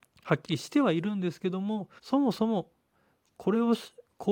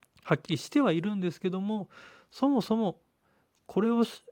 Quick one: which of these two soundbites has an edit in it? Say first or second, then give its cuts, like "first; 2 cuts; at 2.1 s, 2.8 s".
first; 1 cut; at 2.0 s